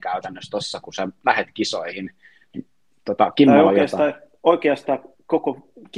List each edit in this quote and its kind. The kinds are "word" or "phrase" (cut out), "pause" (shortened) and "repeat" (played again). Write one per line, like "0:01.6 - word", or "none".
none